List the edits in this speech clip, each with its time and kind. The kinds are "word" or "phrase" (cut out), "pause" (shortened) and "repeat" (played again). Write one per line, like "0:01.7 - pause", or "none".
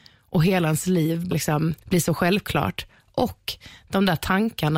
0:01.3 - word
0:01.8 - pause